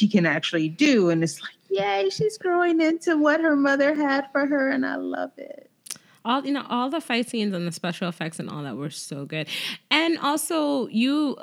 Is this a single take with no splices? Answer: yes; 0 cuts

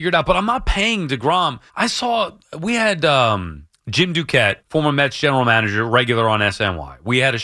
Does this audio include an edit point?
yes; 3 cuts; at 1.7 s, 3.7 s, 4.6 s

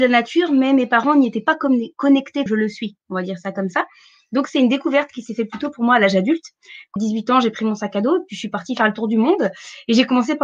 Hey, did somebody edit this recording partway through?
yes; 2 cuts; at 2.5 s, 7.0 s

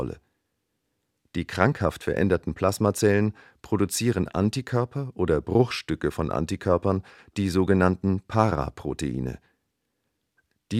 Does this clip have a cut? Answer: no; 0 cuts

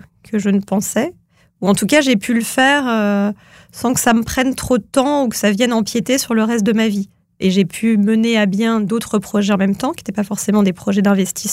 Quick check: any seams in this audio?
no; 0 cuts

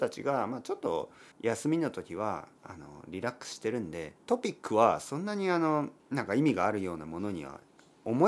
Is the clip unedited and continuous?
no; 3 cuts; at 1.3 s, 4.2 s, 6.0 s

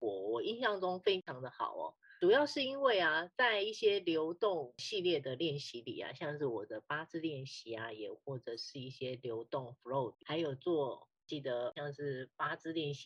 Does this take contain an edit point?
yes; 1 cut; at 10.1 s

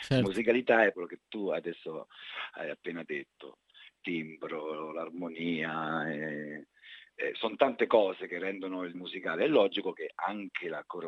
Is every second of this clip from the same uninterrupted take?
no; 3 cuts; at 0.9 s, 4.0 s, 8.9 s

